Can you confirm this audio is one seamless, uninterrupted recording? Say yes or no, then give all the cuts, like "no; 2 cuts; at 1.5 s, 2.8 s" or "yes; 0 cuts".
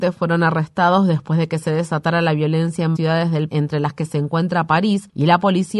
no; 2 cuts; at 3.0 s, 3.5 s